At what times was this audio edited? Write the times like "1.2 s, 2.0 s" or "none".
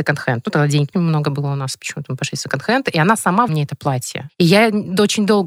0.9 s, 3.5 s